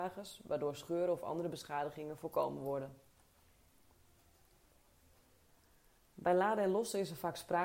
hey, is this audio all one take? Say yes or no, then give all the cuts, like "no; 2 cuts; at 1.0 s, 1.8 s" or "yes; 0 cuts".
yes; 0 cuts